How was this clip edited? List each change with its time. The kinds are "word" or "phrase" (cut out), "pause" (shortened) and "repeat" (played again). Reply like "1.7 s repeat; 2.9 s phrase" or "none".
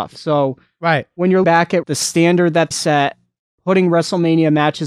1.4 s word; 1.8 s word; 2.7 s word